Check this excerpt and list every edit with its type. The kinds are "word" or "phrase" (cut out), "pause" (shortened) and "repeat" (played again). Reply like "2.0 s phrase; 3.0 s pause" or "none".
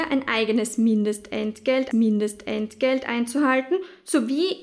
1.9 s repeat